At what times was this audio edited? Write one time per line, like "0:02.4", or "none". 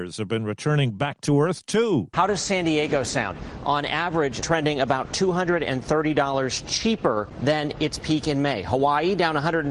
0:04.4